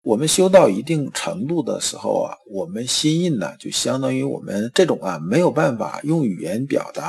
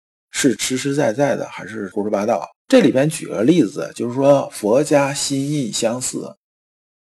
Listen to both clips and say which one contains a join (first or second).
second